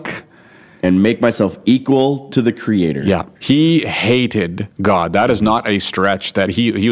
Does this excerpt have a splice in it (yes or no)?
yes